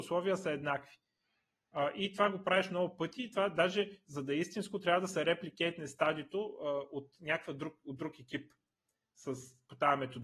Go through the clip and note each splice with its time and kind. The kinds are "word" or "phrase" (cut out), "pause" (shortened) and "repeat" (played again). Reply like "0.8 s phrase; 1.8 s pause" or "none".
none